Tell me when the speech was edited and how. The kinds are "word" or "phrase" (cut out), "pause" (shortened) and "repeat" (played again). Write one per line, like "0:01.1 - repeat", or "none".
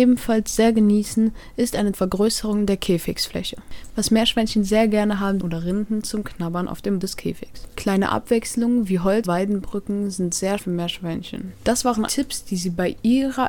0:01.9 - phrase
0:05.4 - phrase
0:07.0 - word
0:09.2 - word
0:10.6 - word
0:12.1 - word